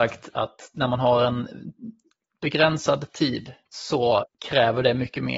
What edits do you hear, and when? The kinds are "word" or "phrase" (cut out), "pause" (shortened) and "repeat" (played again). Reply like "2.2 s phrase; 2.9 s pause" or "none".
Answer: none